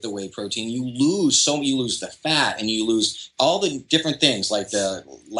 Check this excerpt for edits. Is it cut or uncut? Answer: uncut